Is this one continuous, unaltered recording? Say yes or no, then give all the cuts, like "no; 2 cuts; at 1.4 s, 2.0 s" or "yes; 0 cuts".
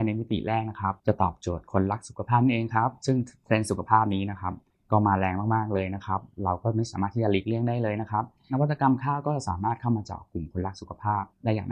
no; 1 cut; at 1.0 s